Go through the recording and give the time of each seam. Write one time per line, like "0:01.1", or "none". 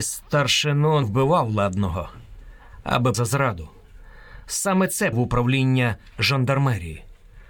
0:01.0
0:03.1
0:05.1